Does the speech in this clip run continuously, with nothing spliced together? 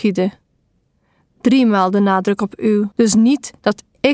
no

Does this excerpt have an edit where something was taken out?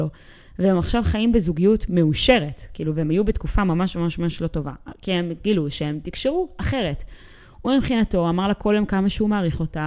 no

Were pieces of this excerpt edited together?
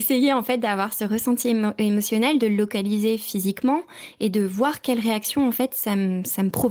no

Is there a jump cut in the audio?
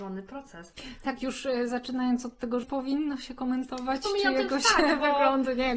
yes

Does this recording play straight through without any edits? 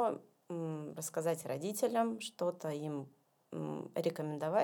yes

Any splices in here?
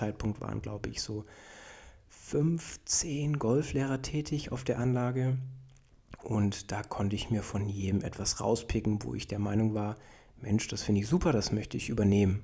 no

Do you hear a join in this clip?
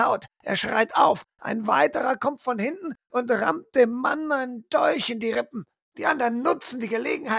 no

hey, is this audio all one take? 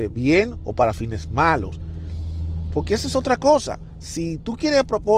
yes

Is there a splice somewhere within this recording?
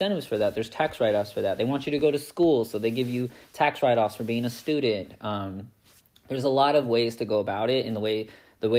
no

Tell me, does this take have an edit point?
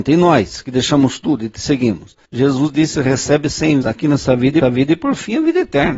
yes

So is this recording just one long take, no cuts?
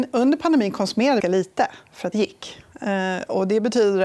no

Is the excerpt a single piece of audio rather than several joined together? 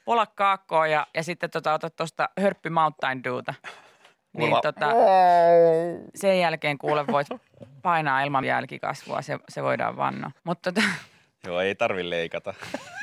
no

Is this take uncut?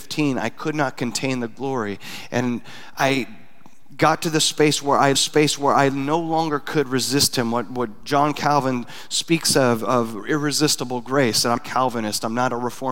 no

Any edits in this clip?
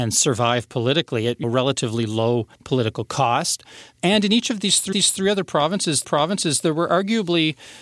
yes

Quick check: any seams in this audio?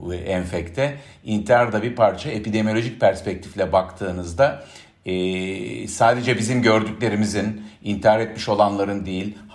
no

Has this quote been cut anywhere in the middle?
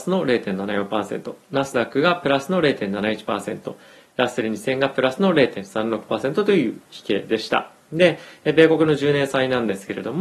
no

